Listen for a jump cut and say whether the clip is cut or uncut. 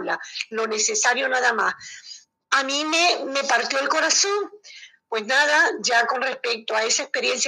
cut